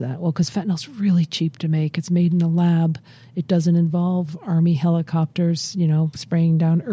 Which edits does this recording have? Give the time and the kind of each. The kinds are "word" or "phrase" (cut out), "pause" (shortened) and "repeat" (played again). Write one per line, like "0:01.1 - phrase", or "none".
none